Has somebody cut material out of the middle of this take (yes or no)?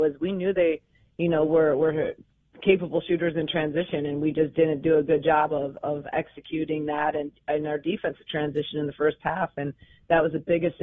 no